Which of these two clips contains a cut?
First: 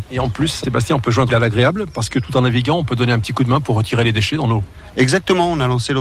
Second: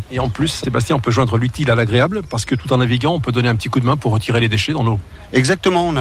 first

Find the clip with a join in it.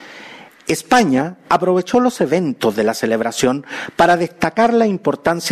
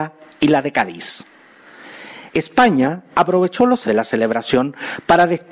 second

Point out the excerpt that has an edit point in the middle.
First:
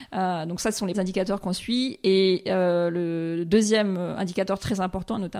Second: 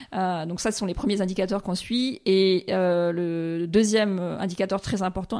first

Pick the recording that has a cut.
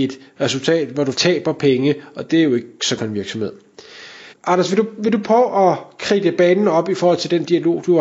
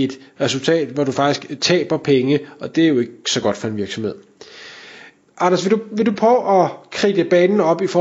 first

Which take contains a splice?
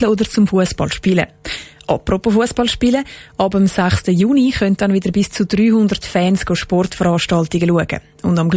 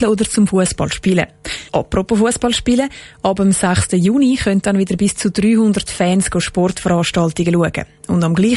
second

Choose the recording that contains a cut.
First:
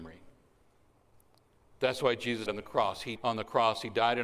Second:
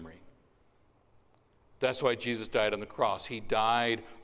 first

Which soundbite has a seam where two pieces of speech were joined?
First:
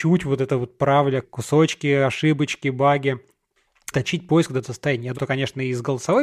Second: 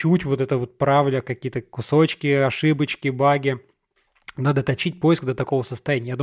first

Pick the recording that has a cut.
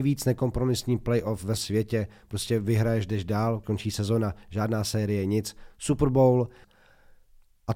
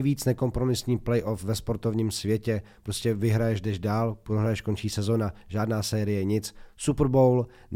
first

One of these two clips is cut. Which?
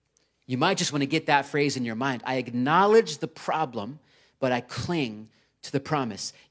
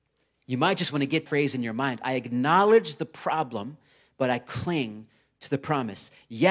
second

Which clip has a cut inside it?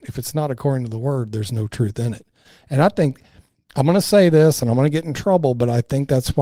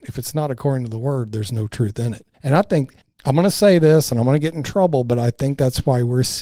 second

